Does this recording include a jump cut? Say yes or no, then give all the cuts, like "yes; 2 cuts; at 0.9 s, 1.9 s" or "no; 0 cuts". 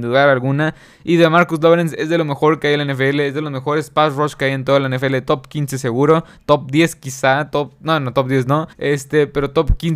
yes; 1 cut; at 8.7 s